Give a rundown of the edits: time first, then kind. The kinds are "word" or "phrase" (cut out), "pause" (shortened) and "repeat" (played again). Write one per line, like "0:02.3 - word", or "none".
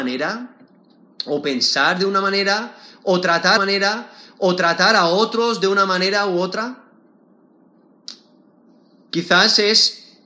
0:03.6 - repeat